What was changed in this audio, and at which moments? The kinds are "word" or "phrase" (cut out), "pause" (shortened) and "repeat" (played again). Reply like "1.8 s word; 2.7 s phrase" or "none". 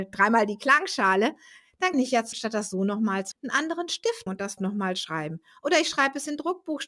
1.9 s word; 2.3 s word; 3.3 s word; 4.3 s word; 4.6 s word

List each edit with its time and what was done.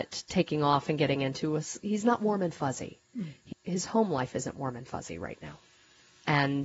3.5 s word

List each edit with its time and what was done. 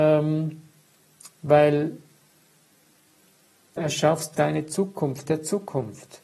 3.8 s word; 4.3 s word; 5.3 s word

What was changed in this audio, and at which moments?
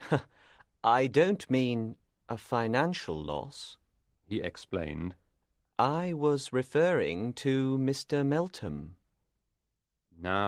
none

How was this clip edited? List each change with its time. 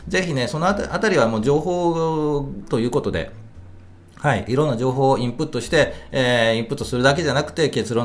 none

